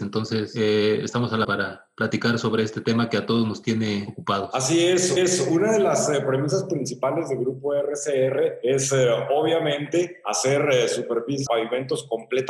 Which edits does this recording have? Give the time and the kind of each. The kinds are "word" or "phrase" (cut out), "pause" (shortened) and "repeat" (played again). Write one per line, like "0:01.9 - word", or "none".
0:01.4 - word
0:05.2 - repeat
0:11.5 - word